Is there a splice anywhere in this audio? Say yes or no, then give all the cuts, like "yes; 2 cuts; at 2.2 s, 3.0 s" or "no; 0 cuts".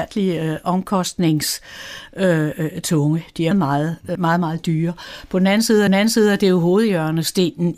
yes; 3 cuts; at 3.5 s, 4.2 s, 5.9 s